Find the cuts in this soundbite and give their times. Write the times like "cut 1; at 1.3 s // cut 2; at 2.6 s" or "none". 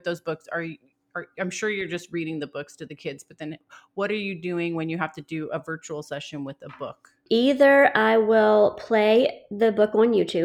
none